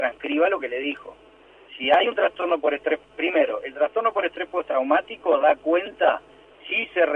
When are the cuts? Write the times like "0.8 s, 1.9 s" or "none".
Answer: none